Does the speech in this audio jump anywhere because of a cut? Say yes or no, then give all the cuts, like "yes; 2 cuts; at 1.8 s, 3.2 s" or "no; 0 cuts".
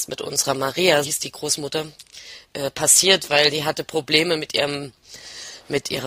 yes; 1 cut; at 1.0 s